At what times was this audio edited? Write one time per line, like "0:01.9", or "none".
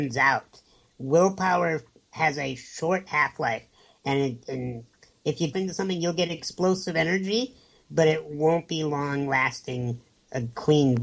0:05.0
0:05.5